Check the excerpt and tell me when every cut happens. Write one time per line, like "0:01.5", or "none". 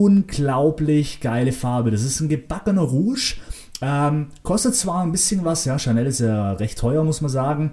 none